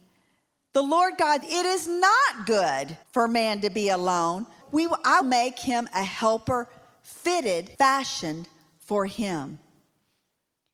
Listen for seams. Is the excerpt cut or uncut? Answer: cut